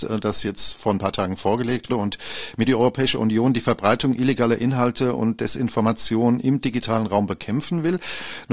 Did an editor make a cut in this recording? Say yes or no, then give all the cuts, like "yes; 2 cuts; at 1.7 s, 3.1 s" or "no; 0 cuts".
yes; 2 cuts; at 1.9 s, 2.7 s